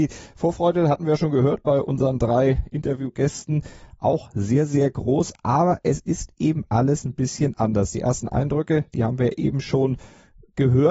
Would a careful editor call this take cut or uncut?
uncut